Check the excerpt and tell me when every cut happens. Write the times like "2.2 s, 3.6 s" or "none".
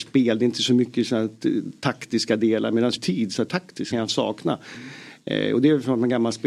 3.0 s, 3.5 s, 3.9 s